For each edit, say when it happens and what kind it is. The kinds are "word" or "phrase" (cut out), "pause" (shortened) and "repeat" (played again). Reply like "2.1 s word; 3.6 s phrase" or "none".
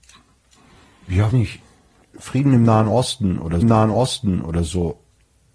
1.3 s word; 2.1 s word; 3.6 s repeat